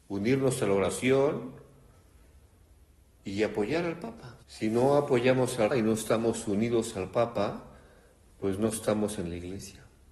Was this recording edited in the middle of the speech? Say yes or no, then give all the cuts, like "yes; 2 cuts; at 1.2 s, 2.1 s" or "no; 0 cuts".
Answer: yes; 2 cuts; at 4.4 s, 5.7 s